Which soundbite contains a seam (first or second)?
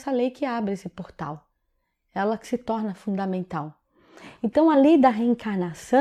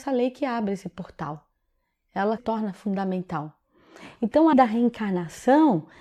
second